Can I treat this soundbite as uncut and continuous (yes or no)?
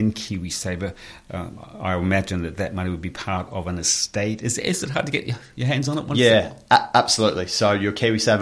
yes